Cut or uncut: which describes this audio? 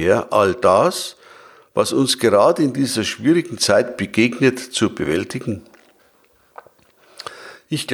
uncut